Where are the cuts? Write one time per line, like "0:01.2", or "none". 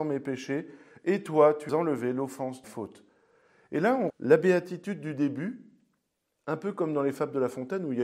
0:01.7
0:02.6
0:04.1